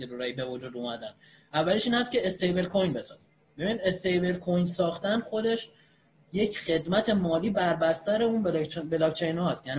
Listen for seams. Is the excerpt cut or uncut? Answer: uncut